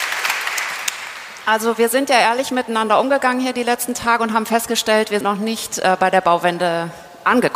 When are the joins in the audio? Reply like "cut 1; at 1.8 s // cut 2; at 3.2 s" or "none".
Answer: cut 1; at 5.2 s